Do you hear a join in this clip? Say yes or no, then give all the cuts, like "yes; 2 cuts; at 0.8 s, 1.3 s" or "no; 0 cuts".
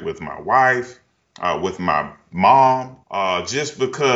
yes; 1 cut; at 3.0 s